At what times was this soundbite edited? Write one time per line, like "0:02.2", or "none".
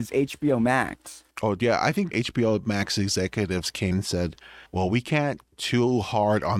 0:01.3
0:02.1
0:03.9
0:04.7
0:05.5